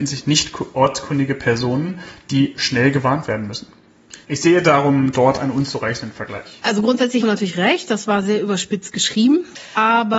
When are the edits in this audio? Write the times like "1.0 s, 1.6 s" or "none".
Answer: 4.2 s, 7.2 s